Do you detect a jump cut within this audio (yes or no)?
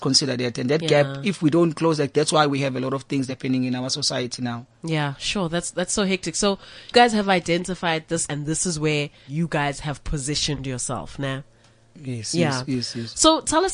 yes